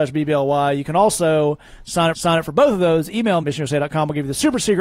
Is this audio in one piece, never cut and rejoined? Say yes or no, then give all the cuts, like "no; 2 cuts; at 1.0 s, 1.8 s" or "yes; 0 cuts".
no; 2 cuts; at 2.1 s, 3.4 s